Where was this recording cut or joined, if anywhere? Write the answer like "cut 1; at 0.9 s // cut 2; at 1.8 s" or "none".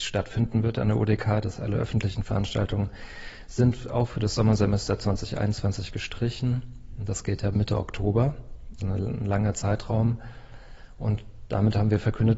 cut 1; at 1.6 s // cut 2; at 7.5 s // cut 3; at 8.8 s